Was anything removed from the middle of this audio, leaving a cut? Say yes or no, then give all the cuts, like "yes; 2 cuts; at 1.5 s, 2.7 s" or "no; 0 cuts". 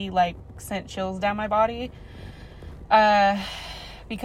no; 0 cuts